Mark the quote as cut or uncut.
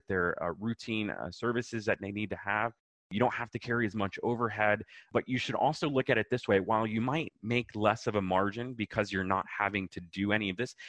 uncut